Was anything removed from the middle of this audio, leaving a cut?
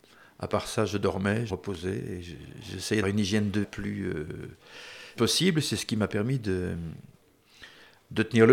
yes; 4 cuts; at 1.5 s, 3.0 s, 3.6 s, 5.2 s

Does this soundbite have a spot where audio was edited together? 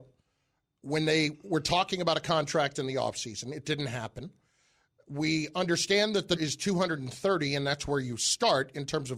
yes; 1 cut; at 6.4 s

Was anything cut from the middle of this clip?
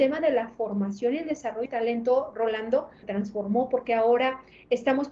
yes; 2 cuts; at 1.7 s, 3.0 s

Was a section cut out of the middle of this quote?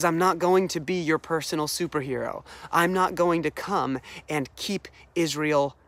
no; 0 cuts

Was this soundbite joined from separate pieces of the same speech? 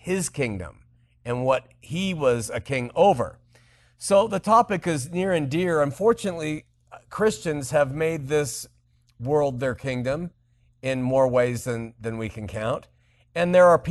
no; 0 cuts

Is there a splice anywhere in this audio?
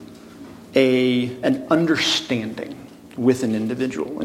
no; 0 cuts

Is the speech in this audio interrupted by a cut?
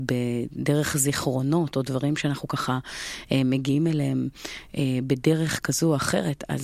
no; 0 cuts

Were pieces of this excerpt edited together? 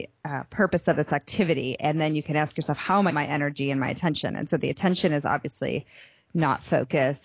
yes; 1 cut; at 3.1 s

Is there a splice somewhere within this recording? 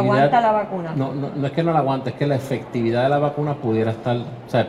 no; 0 cuts

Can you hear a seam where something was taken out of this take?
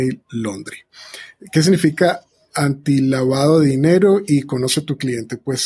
no; 0 cuts

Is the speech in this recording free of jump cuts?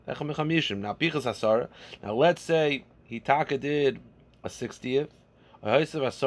yes; 0 cuts

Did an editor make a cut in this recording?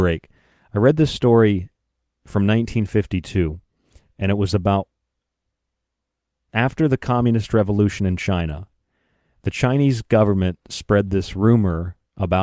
no; 0 cuts

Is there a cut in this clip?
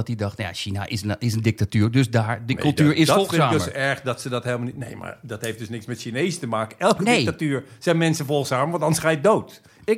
no; 0 cuts

